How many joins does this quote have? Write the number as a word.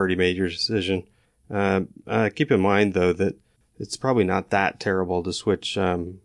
zero